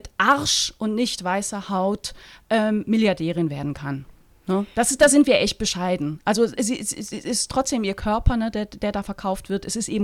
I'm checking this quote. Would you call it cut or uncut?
uncut